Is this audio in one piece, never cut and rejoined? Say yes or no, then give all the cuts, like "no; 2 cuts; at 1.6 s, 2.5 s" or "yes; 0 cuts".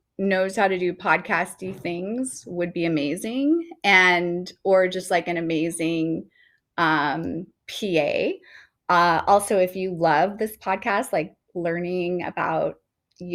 yes; 0 cuts